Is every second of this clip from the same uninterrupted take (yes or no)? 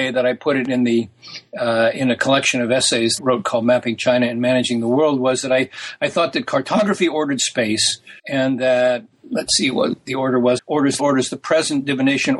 no